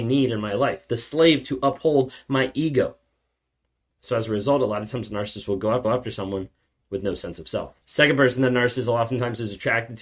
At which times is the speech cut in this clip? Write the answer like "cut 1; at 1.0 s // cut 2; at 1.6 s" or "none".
cut 1; at 5.8 s // cut 2; at 7.8 s